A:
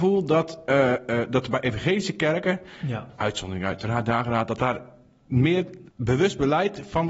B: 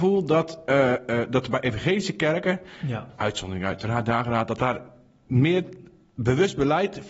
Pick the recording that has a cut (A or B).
A